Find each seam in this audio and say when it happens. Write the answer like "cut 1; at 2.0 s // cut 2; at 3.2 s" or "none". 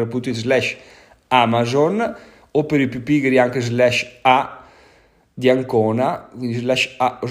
none